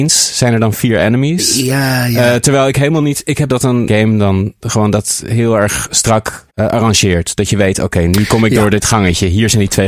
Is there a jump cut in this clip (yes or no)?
yes